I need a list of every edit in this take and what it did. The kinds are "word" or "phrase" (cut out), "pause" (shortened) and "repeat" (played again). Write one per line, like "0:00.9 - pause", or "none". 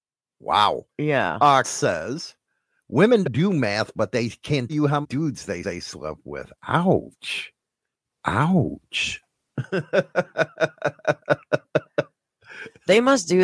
0:00.9 - pause
0:01.6 - word
0:03.2 - word
0:04.7 - word
0:05.0 - word
0:05.6 - repeat